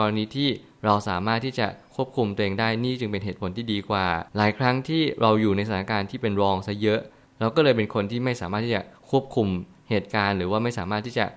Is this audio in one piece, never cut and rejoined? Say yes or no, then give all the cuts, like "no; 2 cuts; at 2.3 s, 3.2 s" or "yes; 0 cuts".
no; 1 cut; at 4.3 s